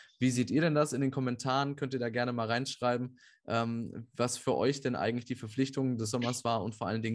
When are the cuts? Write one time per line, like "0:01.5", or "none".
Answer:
none

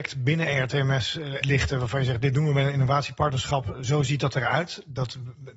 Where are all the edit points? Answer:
0:01.4

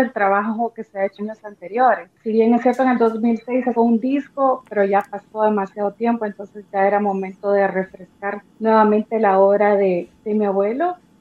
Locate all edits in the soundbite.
0:01.2
0:03.7
0:08.5

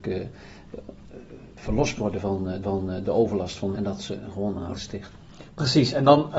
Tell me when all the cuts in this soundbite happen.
0:02.0
0:02.6
0:03.7
0:04.7

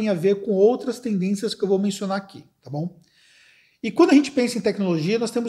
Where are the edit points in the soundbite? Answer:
none

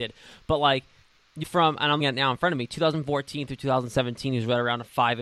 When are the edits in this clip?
0:01.4
0:02.0

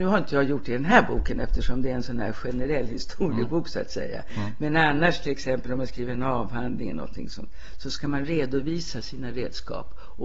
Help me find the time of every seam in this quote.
none

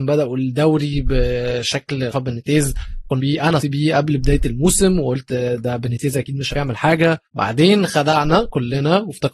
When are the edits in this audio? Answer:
0:02.1
0:03.2
0:03.6
0:06.5
0:07.3

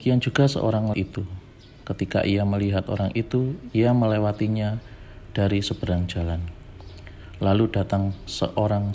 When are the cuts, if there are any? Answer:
0:00.9

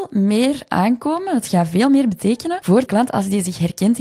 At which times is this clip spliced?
0:02.9

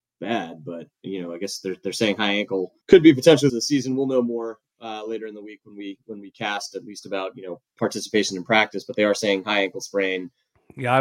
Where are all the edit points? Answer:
0:02.8
0:03.5

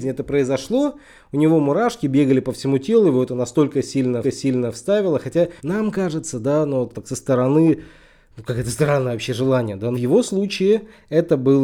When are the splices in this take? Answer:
0:04.2
0:05.6
0:06.9
0:09.9

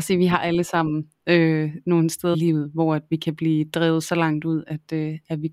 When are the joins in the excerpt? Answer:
0:02.3

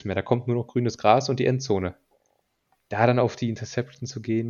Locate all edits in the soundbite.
none

